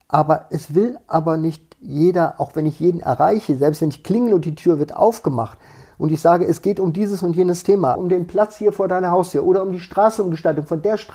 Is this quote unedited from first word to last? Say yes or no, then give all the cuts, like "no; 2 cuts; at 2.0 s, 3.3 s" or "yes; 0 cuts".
no; 1 cut; at 8.0 s